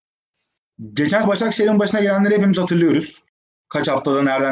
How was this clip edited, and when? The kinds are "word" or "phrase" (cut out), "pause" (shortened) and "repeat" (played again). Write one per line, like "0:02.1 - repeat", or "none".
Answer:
0:01.2 - word